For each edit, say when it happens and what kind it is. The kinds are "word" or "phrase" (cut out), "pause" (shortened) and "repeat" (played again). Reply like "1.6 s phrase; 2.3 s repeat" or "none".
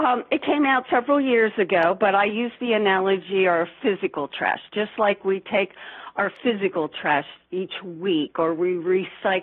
none